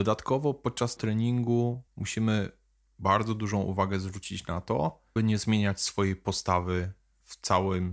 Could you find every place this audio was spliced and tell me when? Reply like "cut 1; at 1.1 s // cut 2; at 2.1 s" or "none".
cut 1; at 1.0 s // cut 2; at 1.9 s // cut 3; at 5.2 s